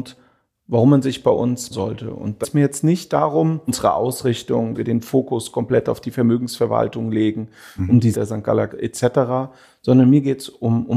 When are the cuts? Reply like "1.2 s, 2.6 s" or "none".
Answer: 1.7 s, 2.4 s, 3.7 s, 4.7 s, 8.1 s, 8.7 s